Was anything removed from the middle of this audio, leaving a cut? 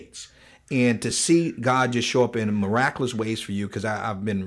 no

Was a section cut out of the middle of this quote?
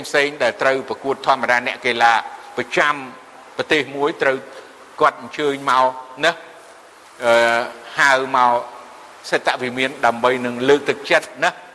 no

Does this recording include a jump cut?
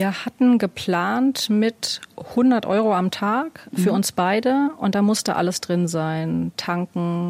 no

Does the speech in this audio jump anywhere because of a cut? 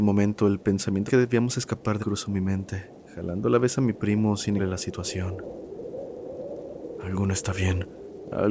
yes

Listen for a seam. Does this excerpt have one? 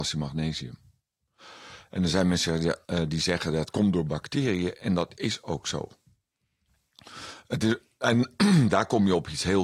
yes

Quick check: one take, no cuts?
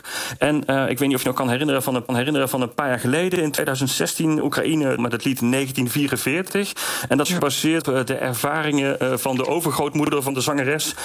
no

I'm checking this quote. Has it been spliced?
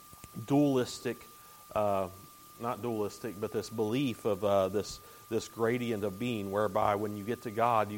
no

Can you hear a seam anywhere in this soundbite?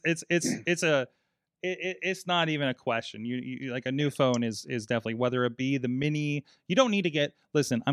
no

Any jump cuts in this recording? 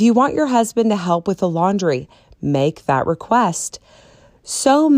no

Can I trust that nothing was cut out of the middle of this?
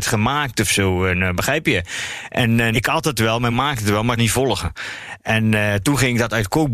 no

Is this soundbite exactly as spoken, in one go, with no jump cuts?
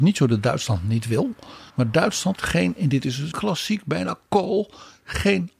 no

